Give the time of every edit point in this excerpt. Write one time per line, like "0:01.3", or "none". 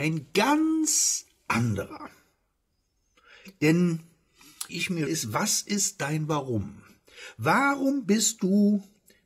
0:04.7
0:05.1